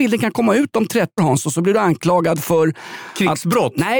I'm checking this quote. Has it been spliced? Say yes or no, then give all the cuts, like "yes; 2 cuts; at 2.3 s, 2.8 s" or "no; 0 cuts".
yes; 1 cut; at 1.2 s